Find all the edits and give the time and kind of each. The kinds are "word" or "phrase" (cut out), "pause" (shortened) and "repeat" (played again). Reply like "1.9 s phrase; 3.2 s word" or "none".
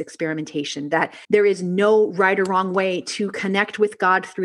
1.2 s pause